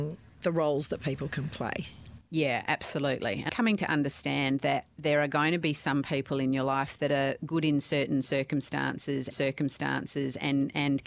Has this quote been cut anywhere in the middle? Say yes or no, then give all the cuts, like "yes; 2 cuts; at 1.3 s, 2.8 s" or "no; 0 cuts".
yes; 3 cuts; at 2.2 s, 3.5 s, 9.3 s